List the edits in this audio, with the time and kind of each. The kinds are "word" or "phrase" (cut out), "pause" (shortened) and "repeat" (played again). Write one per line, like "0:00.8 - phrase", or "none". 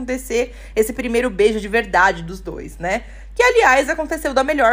none

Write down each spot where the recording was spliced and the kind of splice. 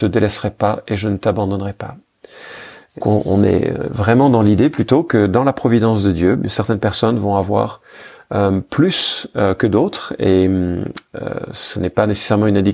0:03.0 - word

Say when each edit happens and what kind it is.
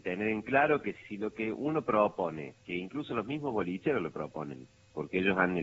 0:01.0 - phrase
0:02.6 - pause

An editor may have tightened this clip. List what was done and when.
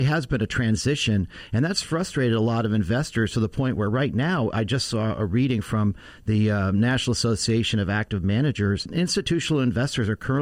none

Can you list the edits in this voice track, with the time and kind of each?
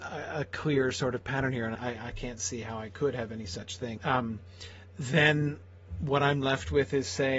0:01.8 - word
0:04.0 - phrase

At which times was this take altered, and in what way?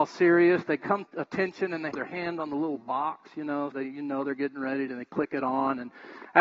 0:01.1 - word
0:01.9 - word
0:03.7 - word

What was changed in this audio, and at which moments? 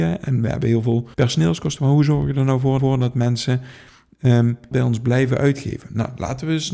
0:01.1 - pause
0:02.8 - repeat
0:04.7 - word

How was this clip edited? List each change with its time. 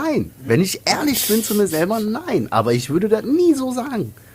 none

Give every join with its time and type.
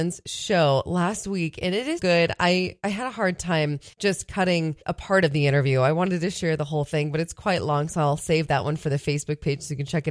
0:02.0 - word
0:03.9 - pause
0:04.8 - pause

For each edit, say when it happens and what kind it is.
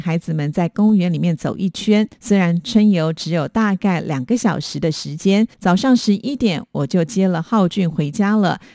0:02.1 - pause
0:05.5 - pause

